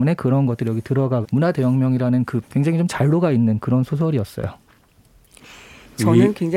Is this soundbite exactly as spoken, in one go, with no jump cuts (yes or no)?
no